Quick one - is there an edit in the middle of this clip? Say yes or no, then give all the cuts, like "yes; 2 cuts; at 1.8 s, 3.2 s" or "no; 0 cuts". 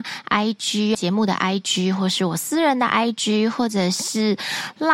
yes; 1 cut; at 0.9 s